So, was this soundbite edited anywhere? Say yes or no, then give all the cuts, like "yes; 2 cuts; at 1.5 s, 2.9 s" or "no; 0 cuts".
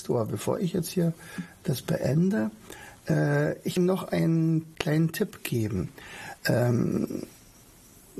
yes; 2 cuts; at 3.8 s, 6.4 s